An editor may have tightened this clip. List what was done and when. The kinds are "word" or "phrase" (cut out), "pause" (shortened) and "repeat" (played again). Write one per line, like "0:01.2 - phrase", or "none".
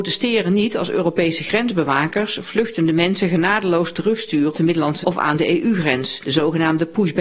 0:04.5 - word
0:05.0 - word